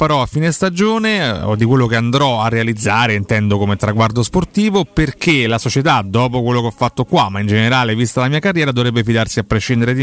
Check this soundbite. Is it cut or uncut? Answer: uncut